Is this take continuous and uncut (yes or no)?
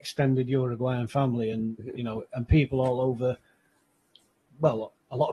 yes